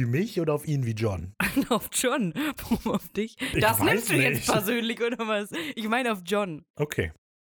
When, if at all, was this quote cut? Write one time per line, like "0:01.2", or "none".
none